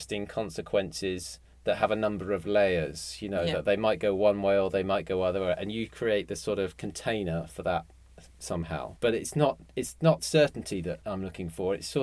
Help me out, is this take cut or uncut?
uncut